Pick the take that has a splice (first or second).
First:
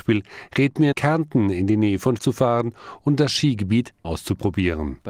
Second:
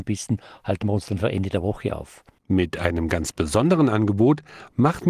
first